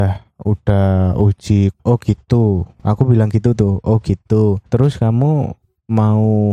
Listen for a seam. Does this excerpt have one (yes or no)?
yes